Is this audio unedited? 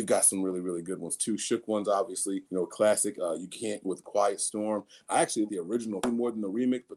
no; 4 cuts; at 2.5 s, 3.8 s, 5.5 s, 6.0 s

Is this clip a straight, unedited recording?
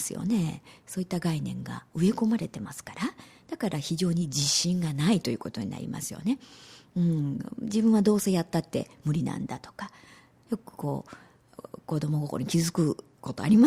no; 1 cut; at 10.5 s

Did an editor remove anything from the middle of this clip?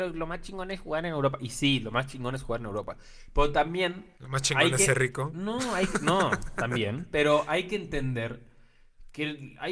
yes; 1 cut; at 4.1 s

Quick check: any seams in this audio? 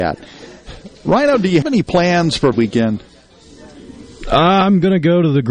yes; 2 cuts; at 1.6 s, 2.5 s

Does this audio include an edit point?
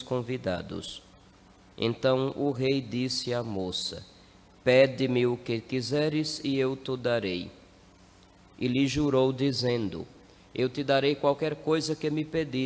no; 0 cuts

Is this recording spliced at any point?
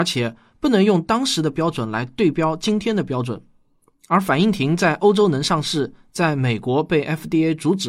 no; 0 cuts

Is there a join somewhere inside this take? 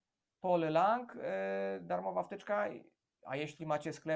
no; 0 cuts

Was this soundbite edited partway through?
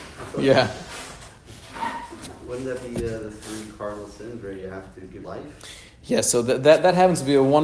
yes; 1 cut; at 5.2 s

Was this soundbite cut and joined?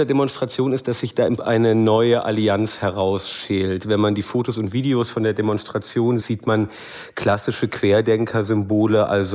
yes; 2 cuts; at 1.4 s, 6.2 s

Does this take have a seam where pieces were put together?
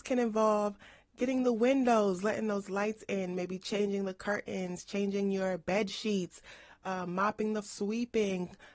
yes; 1 cut; at 7.6 s

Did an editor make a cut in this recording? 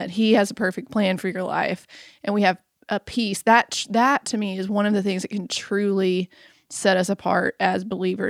no; 0 cuts

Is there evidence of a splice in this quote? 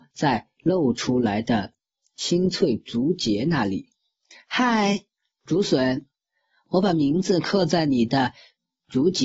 no; 0 cuts

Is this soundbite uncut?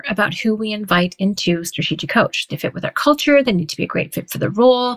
no; 1 cut; at 2.5 s

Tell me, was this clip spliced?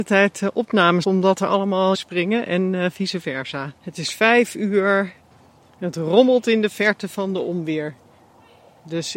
yes; 3 cuts; at 1.0 s, 1.9 s, 3.8 s

